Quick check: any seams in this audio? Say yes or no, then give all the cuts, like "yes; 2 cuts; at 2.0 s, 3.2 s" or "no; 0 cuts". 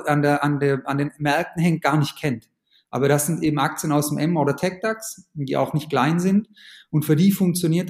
no; 0 cuts